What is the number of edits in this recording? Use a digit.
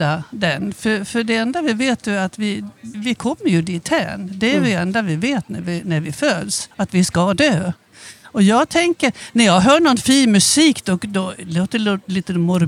2